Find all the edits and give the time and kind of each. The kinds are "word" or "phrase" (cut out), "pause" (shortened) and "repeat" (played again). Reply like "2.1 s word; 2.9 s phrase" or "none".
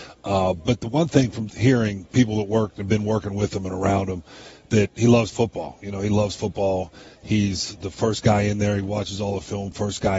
1.5 s word; 7.8 s word